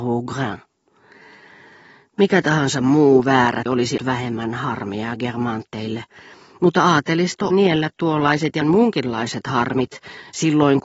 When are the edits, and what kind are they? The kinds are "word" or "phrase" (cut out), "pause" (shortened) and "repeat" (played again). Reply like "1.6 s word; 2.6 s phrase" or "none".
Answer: 3.7 s word; 4.0 s word; 7.5 s word; 8.6 s word